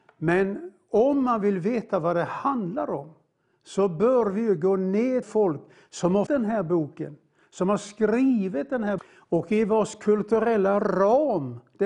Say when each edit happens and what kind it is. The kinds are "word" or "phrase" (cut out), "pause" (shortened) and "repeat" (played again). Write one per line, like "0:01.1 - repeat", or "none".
0:05.2 - phrase
0:06.3 - word
0:09.0 - word